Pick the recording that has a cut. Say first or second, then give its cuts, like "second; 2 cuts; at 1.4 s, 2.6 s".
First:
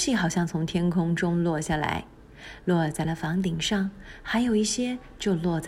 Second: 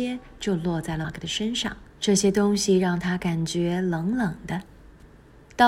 second; 2 cuts; at 1.0 s, 1.9 s